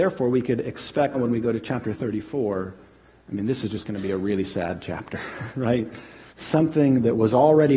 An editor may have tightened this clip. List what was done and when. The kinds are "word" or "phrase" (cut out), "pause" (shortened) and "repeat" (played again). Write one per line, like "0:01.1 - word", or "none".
0:01.1 - word
0:06.3 - pause